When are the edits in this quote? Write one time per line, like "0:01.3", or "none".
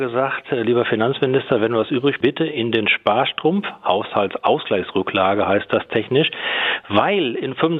0:02.2